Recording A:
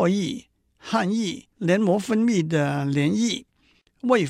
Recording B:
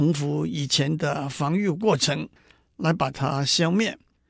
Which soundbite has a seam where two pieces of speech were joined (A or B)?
A